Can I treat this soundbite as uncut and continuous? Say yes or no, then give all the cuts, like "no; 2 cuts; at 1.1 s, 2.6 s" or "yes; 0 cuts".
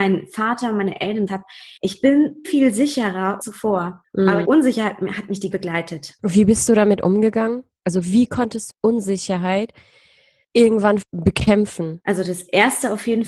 no; 8 cuts; at 1.3 s, 1.8 s, 2.4 s, 3.4 s, 4.4 s, 5.5 s, 8.7 s, 11.0 s